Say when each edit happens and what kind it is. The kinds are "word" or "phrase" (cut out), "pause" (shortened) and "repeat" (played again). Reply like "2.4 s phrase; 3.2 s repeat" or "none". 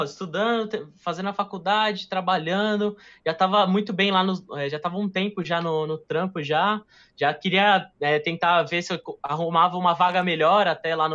none